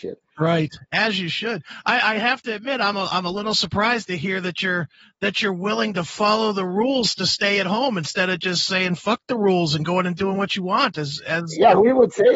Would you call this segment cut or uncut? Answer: uncut